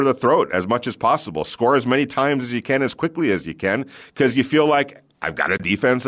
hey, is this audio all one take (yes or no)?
yes